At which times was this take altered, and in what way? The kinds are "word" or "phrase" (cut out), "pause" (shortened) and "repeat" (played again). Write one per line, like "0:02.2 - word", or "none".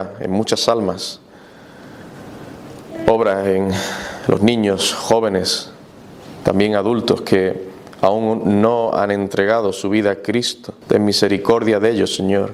0:10.8 - pause